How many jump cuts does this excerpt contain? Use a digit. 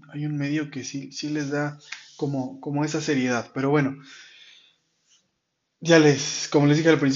0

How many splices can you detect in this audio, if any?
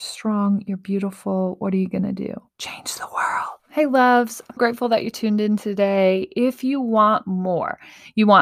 3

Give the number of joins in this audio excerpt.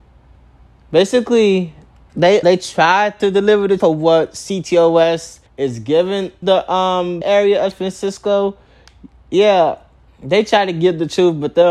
8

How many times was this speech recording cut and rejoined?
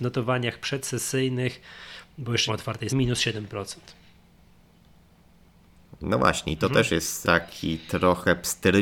3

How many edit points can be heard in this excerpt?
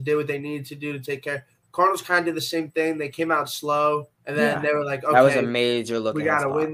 1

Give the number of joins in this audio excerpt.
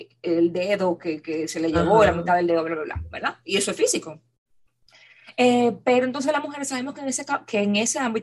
0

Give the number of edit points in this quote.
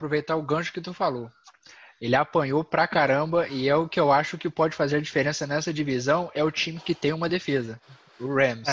0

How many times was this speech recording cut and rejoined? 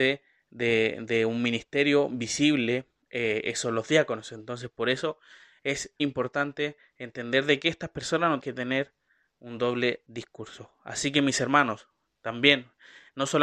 3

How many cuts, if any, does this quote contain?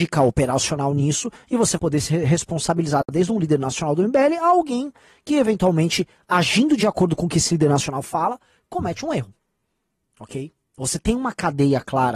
1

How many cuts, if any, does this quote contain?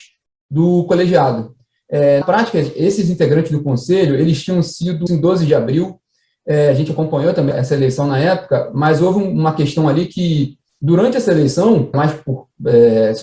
4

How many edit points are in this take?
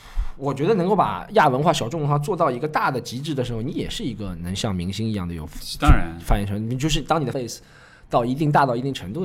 1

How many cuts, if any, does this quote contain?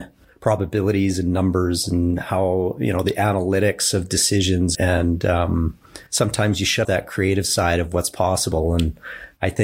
3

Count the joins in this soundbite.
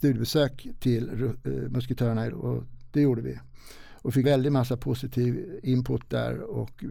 2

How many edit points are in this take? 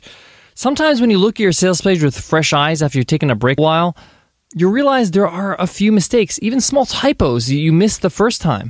1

